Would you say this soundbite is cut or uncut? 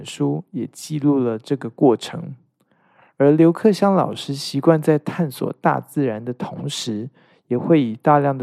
uncut